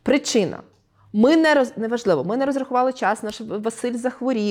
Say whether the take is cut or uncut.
uncut